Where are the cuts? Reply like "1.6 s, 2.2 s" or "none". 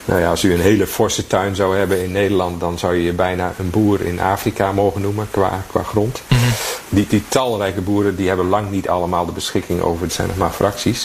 3.5 s, 10.1 s